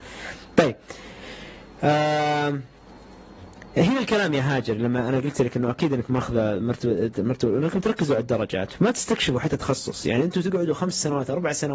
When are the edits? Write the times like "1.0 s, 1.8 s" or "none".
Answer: none